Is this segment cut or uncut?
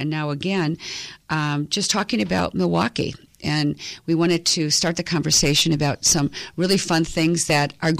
uncut